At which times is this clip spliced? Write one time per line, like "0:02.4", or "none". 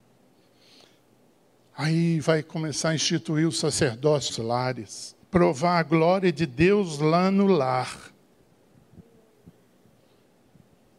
0:02.2
0:04.3
0:05.2